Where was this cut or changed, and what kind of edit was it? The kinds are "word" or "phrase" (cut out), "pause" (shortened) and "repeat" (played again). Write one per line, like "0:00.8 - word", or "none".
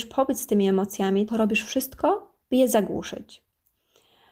0:01.3 - word
0:02.4 - pause